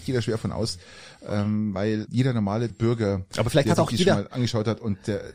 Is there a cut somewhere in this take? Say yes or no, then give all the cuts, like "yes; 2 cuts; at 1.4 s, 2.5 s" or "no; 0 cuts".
yes; 2 cuts; at 2.1 s, 2.7 s